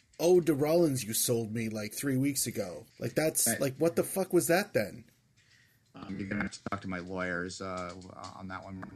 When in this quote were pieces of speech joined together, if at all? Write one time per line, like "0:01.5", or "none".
0:02.9